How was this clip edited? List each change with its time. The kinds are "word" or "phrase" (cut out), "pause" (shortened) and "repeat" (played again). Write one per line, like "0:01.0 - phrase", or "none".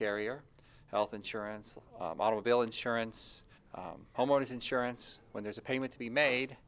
0:01.9 - pause
0:03.6 - pause